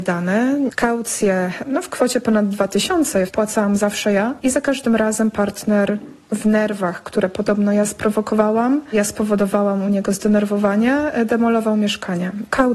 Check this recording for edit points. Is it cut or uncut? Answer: uncut